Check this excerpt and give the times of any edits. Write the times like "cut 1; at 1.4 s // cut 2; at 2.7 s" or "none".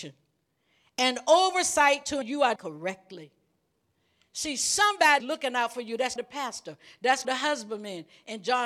cut 1; at 2.2 s // cut 2; at 2.6 s // cut 3; at 5.2 s // cut 4; at 6.2 s // cut 5; at 7.2 s